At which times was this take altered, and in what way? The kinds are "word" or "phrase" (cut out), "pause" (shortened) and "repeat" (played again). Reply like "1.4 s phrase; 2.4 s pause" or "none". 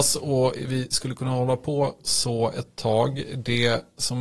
none

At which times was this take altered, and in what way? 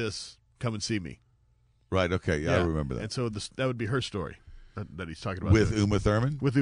none

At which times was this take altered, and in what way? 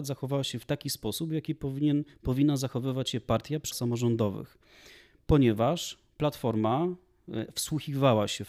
3.7 s word

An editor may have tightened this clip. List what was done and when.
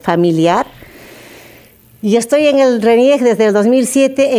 none

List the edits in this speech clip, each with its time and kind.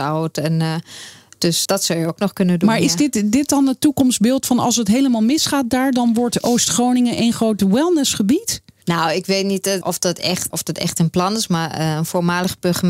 1.7 s word; 9.8 s word; 10.5 s word

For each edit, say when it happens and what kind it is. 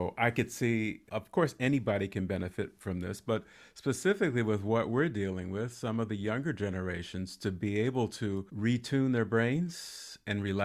none

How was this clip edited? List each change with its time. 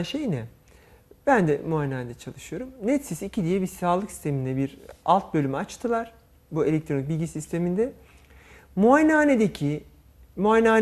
none

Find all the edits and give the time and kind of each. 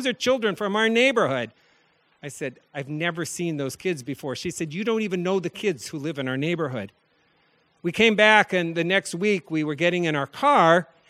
none

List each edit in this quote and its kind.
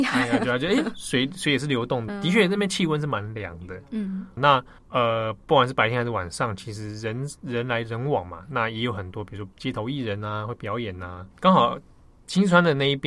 2.1 s word; 4.4 s word; 4.8 s pause; 9.5 s pause; 11.3 s pause

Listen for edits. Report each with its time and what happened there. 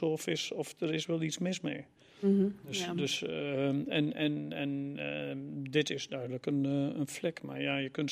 none

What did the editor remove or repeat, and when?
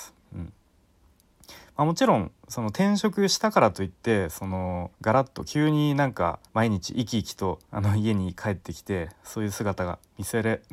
4.9 s pause; 6.5 s pause; 7.6 s pause

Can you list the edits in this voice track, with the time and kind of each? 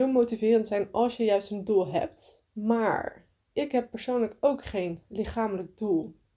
2.5 s pause

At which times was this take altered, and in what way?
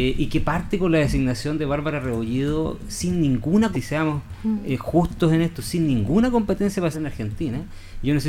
3.7 s word; 6.9 s phrase

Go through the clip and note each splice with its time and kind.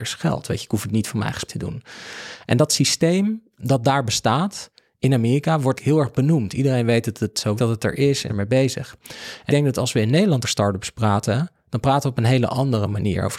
1.5 s word; 3.6 s word; 5.7 s word; 7.6 s word; 8.3 s word; 9.5 s word; 10.4 s word

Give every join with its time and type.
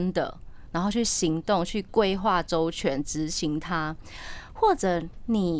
none

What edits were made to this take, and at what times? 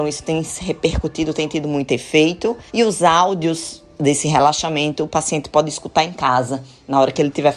2.7 s pause

